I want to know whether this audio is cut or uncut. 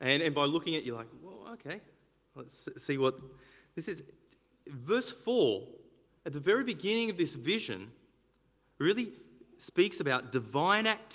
uncut